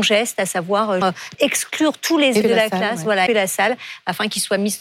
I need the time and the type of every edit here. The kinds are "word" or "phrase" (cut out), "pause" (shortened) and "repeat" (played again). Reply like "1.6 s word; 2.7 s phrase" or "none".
1.0 s word; 1.3 s word; 2.4 s word; 3.3 s word

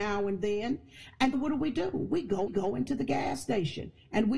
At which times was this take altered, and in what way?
1.3 s word; 2.5 s repeat

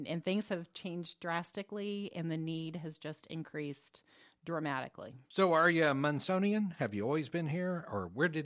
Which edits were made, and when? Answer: 5.2 s pause

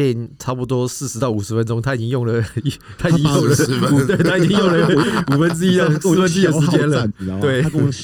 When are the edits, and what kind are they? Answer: 4.1 s word

